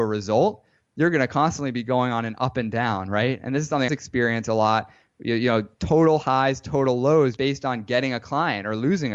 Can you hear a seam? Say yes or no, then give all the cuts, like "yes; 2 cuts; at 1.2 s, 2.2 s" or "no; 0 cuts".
yes; 2 cuts; at 3.9 s, 7.4 s